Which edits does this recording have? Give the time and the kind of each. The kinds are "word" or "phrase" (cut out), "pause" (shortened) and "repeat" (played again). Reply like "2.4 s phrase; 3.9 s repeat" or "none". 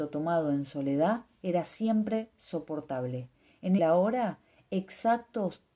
3.8 s phrase